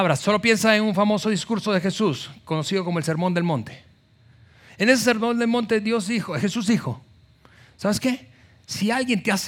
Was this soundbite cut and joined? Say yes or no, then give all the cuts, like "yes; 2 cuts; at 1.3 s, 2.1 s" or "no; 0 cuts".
no; 0 cuts